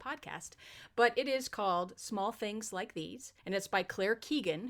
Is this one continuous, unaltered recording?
no; 1 cut; at 3.4 s

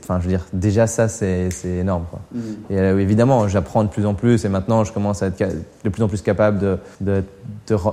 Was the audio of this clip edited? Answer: yes; 1 cut; at 6.9 s

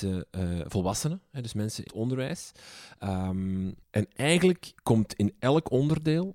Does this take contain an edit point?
yes; 3 cuts; at 1.9 s, 3.8 s, 4.8 s

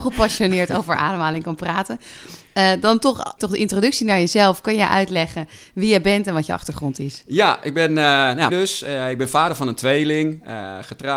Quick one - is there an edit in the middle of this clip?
yes; 2 cuts; at 3.4 s, 8.5 s

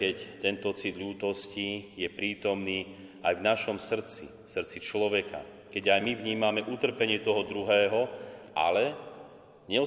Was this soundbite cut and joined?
no; 0 cuts

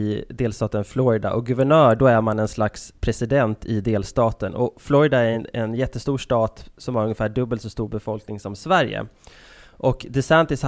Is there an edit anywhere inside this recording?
no; 0 cuts

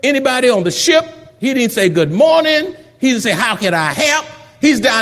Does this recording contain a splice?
no; 0 cuts

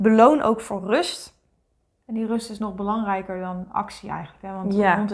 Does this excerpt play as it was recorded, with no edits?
yes; 0 cuts

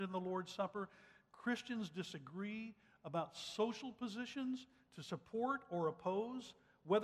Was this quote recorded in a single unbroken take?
yes; 0 cuts

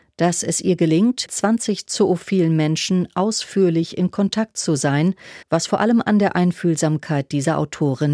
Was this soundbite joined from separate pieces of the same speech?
yes; 2 cuts; at 1.3 s, 5.4 s

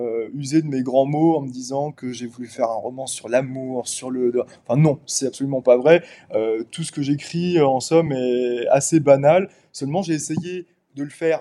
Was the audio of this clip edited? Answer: no; 0 cuts

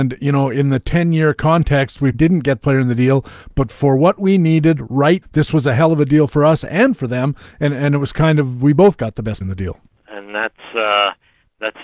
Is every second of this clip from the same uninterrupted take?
no; 4 cuts; at 2.1 s, 2.6 s, 5.2 s, 9.4 s

